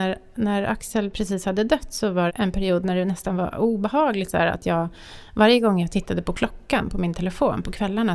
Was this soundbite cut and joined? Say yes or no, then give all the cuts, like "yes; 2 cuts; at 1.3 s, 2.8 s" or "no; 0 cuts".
yes; 1 cut; at 2.3 s